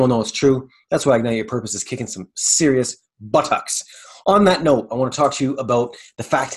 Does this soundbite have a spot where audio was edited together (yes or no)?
no